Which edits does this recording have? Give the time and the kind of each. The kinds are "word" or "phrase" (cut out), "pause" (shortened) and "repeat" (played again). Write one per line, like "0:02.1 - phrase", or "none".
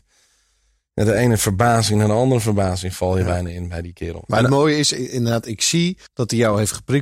0:06.1 - pause